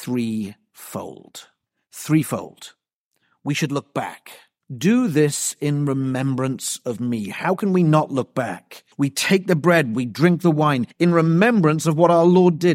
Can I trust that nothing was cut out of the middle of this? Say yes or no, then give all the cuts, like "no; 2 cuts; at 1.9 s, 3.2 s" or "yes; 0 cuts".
no; 4 cuts; at 1.7 s, 4.6 s, 8.9 s, 10.9 s